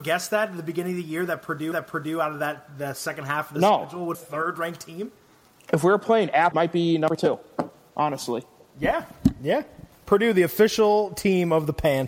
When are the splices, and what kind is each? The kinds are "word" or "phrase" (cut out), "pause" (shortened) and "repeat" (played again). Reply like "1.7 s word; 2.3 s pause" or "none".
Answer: 1.7 s repeat; 4.1 s phrase; 6.5 s phrase